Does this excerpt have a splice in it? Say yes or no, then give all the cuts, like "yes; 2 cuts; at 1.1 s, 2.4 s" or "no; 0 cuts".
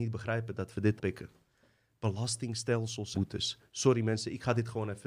yes; 2 cuts; at 1.0 s, 3.1 s